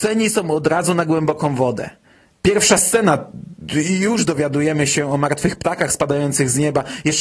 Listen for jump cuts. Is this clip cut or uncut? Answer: uncut